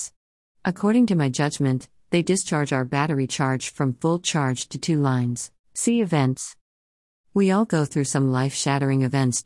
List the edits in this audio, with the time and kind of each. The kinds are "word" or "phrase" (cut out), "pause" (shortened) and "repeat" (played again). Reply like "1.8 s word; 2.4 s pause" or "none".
5.6 s pause